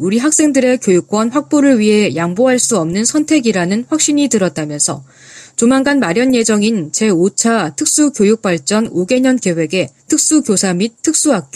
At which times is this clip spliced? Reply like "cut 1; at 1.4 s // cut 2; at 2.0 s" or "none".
cut 1; at 10.0 s